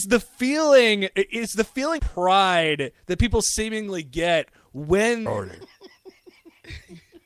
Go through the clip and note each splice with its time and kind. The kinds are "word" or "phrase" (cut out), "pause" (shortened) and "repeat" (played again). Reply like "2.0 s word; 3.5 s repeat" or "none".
1.1 s word; 2.0 s word; 5.3 s phrase